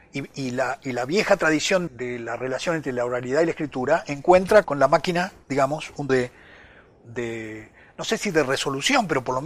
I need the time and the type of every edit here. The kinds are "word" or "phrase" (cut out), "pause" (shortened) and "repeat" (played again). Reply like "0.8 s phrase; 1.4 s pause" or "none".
1.9 s word; 4.6 s word; 6.1 s word